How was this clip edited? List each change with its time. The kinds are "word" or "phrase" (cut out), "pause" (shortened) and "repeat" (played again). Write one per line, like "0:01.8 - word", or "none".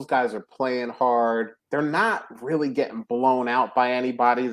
0:01.6 - pause